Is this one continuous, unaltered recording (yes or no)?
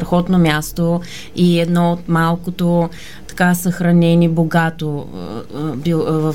yes